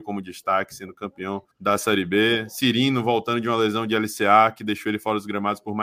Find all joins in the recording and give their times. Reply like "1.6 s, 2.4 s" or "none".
1.5 s